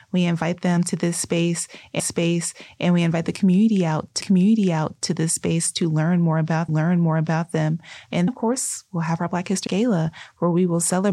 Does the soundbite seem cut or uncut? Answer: cut